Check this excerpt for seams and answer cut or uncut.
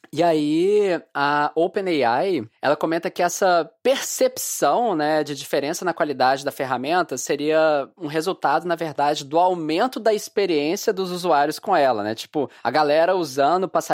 uncut